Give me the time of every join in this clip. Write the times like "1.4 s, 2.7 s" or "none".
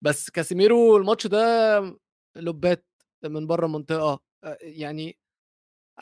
none